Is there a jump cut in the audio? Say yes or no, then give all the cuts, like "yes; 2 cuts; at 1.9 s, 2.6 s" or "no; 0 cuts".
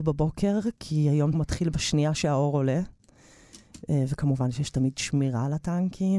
yes; 1 cut; at 1.3 s